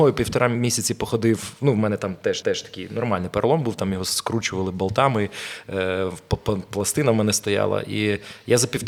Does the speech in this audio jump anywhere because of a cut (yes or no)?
yes